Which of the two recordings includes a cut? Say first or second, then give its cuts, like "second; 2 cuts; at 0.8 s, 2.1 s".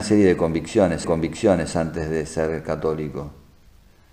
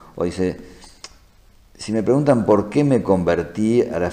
first; 1 cut; at 1.0 s